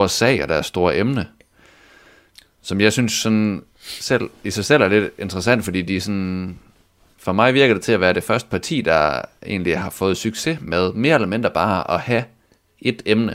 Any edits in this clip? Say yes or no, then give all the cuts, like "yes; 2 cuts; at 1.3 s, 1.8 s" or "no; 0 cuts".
no; 0 cuts